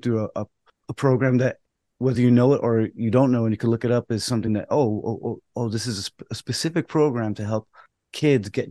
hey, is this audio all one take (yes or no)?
yes